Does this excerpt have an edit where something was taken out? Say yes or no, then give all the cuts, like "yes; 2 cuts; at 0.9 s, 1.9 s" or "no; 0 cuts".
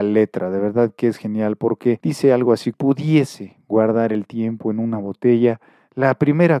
yes; 1 cut; at 2.7 s